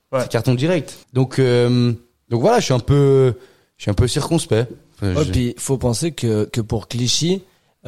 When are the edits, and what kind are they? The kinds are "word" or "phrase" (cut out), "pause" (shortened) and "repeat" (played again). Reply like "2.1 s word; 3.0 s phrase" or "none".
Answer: 1.0 s pause